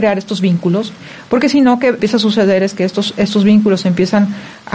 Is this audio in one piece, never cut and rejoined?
no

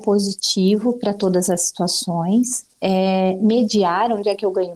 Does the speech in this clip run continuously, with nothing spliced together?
yes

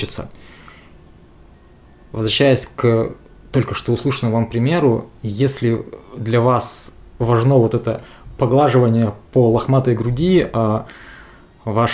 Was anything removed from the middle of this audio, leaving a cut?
no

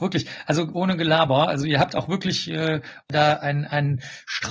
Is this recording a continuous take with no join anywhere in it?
yes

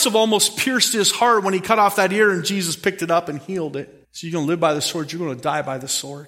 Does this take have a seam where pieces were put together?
yes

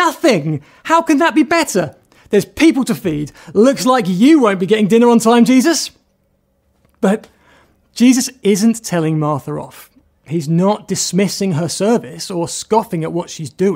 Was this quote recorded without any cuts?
yes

